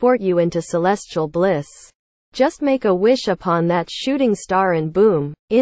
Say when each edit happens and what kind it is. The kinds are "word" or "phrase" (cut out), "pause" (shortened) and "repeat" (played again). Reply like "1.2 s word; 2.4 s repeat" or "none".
none